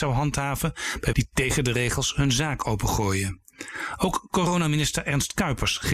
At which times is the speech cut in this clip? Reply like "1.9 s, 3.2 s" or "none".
1.1 s